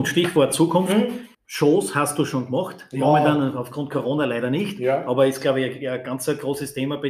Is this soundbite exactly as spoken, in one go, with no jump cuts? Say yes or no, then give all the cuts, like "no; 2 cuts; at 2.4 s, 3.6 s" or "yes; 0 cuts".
no; 1 cut; at 1.3 s